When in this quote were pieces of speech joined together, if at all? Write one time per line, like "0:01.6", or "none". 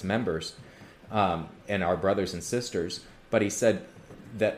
0:01.6